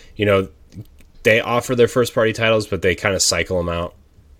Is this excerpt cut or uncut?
cut